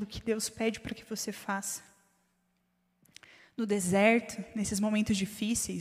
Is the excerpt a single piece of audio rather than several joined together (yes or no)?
yes